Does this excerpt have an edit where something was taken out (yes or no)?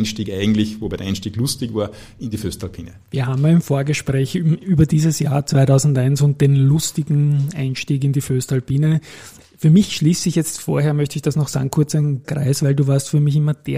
yes